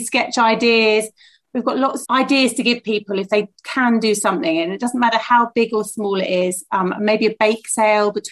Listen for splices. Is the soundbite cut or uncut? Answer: cut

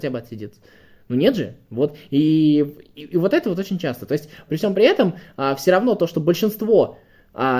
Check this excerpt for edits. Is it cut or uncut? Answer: uncut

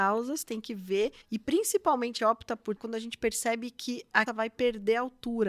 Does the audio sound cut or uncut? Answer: cut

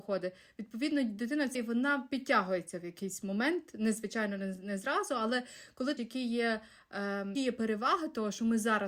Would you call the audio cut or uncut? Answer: cut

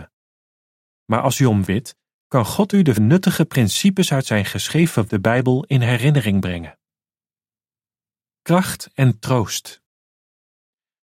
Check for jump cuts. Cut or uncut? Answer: cut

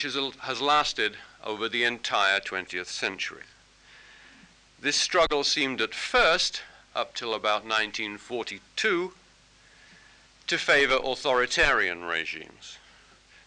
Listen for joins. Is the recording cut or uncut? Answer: uncut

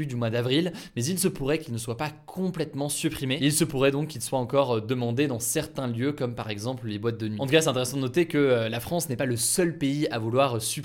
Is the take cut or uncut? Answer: uncut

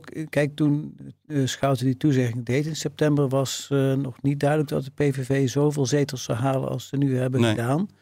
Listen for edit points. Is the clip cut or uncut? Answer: uncut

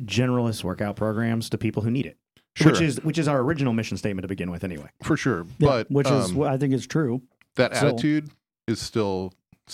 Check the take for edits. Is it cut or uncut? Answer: uncut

